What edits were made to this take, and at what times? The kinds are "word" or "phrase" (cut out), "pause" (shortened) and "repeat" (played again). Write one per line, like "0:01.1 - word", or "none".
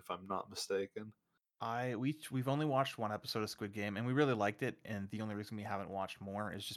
none